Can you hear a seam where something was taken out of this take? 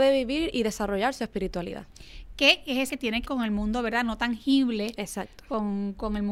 yes; 2 cuts; at 2.9 s, 3.2 s

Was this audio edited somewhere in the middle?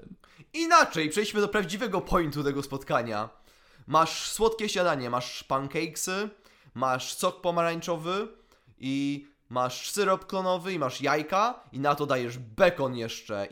no; 0 cuts

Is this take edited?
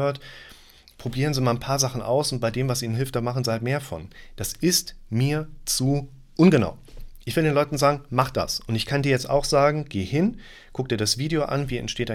no; 0 cuts

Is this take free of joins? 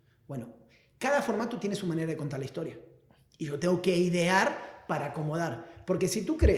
yes; 0 cuts

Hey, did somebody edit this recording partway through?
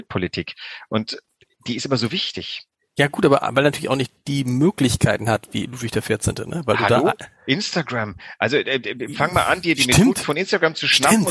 no; 0 cuts

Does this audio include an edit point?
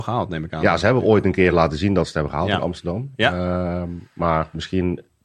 no; 0 cuts

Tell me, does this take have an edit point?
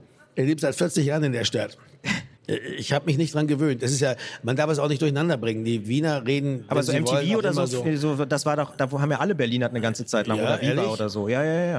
yes; 1 cut; at 2.4 s

